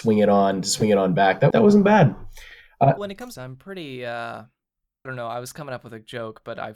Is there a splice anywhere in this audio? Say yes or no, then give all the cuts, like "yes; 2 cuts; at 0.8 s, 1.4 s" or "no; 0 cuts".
yes; 4 cuts; at 1.5 s, 3.0 s, 3.4 s, 5.1 s